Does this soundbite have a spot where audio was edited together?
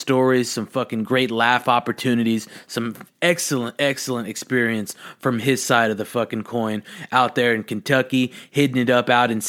yes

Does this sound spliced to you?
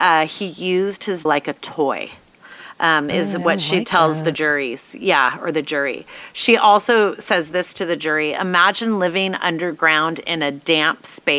yes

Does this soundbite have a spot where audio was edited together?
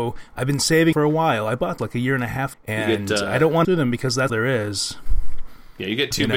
yes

